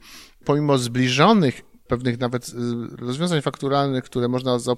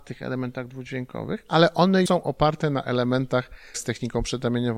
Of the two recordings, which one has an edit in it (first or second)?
second